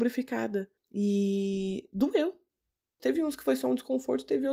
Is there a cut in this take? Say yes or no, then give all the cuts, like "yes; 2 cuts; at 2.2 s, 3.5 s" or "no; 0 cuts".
no; 0 cuts